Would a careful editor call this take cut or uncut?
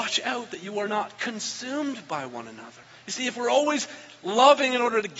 cut